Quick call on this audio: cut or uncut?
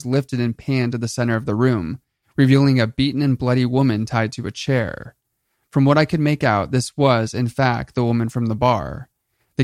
uncut